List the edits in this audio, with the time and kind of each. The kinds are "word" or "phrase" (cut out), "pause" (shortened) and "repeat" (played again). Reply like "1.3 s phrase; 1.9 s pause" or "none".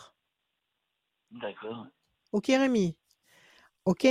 none